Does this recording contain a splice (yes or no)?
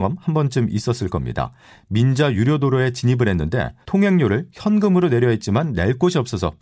no